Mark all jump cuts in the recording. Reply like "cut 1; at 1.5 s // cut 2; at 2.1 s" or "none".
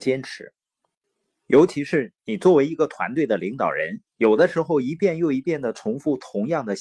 cut 1; at 4.1 s